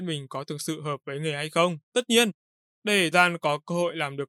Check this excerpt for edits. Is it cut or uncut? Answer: cut